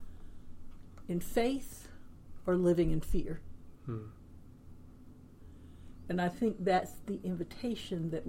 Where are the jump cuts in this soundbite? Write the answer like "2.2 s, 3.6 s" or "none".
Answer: none